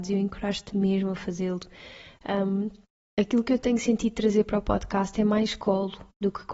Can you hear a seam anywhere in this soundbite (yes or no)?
no